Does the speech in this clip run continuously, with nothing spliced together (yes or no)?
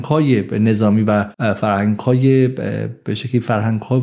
no